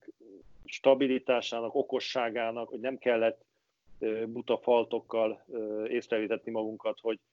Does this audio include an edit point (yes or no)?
yes